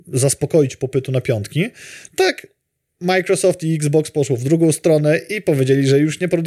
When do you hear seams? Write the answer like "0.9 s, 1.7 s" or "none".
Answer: none